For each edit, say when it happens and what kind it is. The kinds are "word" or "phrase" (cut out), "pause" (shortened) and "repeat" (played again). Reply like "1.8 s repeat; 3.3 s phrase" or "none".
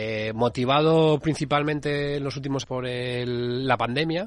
2.6 s word